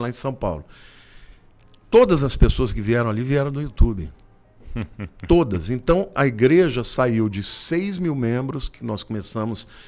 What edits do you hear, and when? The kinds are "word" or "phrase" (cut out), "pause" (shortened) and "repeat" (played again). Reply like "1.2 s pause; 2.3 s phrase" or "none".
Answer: none